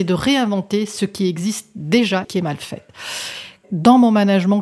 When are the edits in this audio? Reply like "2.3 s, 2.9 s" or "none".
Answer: 2.2 s